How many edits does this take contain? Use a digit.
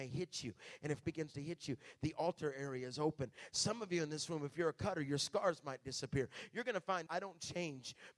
2